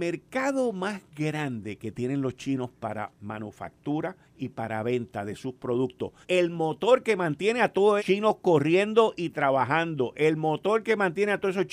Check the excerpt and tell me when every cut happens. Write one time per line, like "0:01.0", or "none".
0:04.2
0:06.2
0:08.0